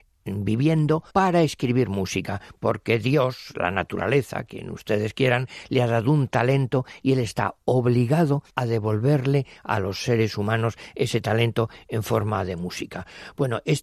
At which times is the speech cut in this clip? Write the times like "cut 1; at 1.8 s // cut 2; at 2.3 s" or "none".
cut 1; at 1.1 s // cut 2; at 8.5 s

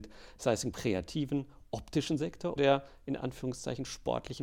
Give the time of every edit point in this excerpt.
cut 1; at 2.6 s

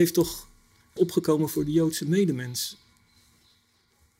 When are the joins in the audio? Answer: cut 1; at 1.0 s

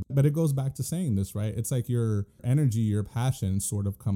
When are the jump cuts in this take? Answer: none

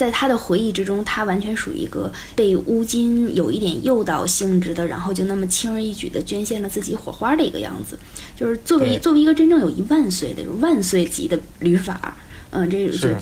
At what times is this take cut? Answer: cut 1; at 2.4 s

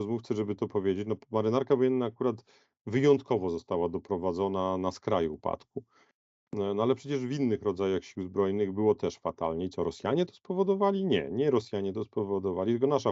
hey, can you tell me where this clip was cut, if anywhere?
none

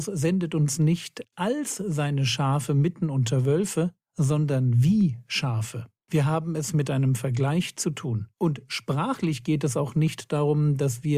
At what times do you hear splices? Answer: cut 1; at 4.0 s // cut 2; at 6.0 s // cut 3; at 8.3 s

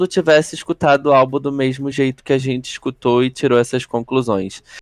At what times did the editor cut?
none

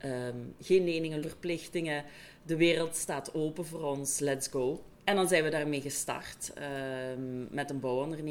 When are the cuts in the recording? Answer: cut 1; at 1.2 s // cut 2; at 4.9 s

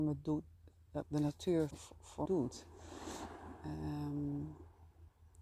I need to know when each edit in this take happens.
cut 1; at 1.0 s // cut 2; at 1.7 s // cut 3; at 2.3 s

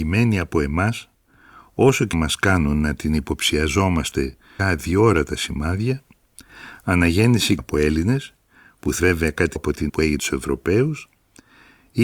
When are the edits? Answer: cut 1; at 2.1 s // cut 2; at 4.6 s // cut 3; at 7.6 s // cut 4; at 9.0 s // cut 5; at 9.6 s // cut 6; at 9.9 s // cut 7; at 10.2 s

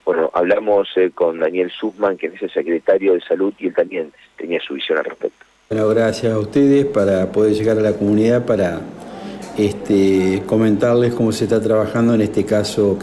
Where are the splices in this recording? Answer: none

